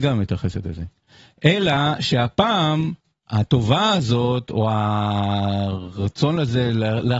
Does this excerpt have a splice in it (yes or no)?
no